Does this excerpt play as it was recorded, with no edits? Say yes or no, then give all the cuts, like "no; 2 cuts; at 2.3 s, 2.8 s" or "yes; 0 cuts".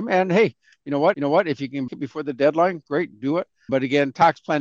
no; 3 cuts; at 1.1 s, 1.9 s, 3.7 s